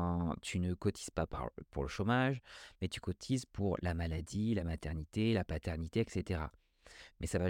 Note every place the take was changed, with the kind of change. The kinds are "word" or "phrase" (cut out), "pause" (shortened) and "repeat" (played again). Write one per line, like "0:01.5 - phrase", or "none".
none